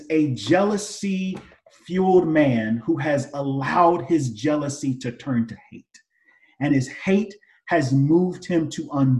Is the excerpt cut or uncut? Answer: uncut